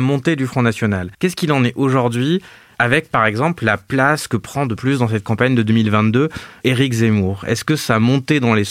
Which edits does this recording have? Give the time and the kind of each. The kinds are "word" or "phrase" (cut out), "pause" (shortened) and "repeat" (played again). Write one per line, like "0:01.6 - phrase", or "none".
0:01.1 - pause
0:04.8 - phrase

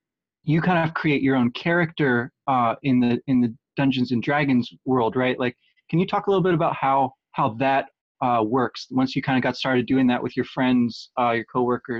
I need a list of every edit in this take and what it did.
0:07.2 - pause

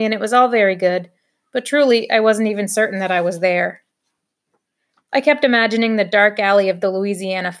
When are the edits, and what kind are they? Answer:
none

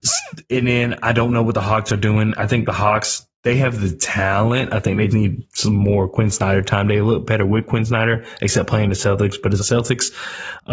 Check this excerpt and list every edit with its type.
0:05.1 - word
0:09.6 - word

